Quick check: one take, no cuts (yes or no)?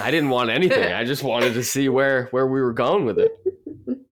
yes